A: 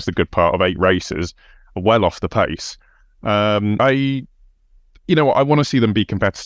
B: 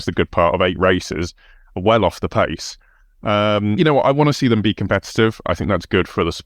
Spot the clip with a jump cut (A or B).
B